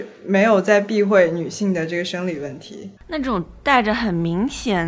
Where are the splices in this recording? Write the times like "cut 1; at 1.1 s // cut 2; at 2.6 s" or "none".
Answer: cut 1; at 3.0 s